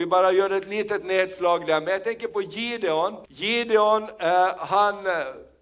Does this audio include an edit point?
yes; 1 cut; at 3.3 s

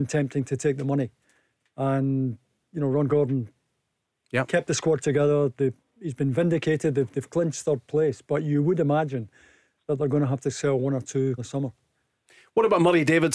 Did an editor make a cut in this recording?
yes; 2 cuts; at 5.8 s, 11.4 s

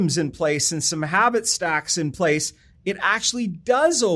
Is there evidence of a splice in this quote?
no; 0 cuts

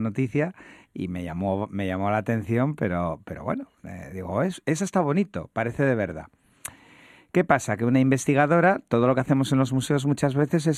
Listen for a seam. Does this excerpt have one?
no; 0 cuts

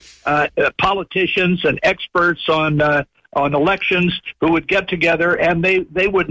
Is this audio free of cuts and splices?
yes; 0 cuts

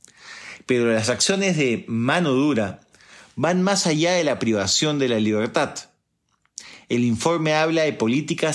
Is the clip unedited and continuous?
yes; 0 cuts

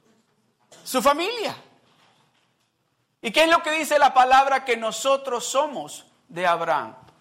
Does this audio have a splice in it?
no; 0 cuts

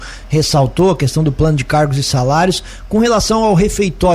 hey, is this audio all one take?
yes; 0 cuts

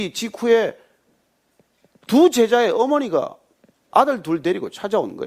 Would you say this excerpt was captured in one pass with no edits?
yes; 0 cuts

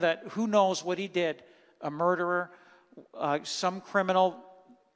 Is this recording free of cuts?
yes; 0 cuts

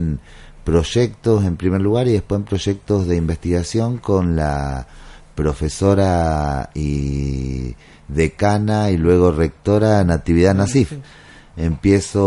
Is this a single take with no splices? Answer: yes; 0 cuts

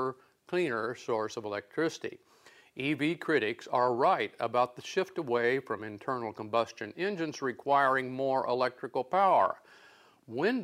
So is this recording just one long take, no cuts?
yes; 0 cuts

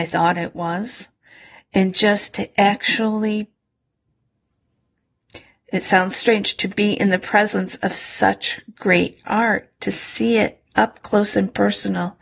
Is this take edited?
no; 0 cuts

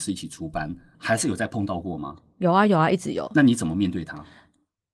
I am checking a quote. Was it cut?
yes; 1 cut; at 0.9 s

